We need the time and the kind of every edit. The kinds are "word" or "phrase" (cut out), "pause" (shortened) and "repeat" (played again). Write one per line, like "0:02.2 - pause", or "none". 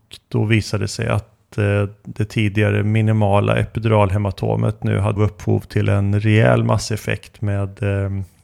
0:05.2 - phrase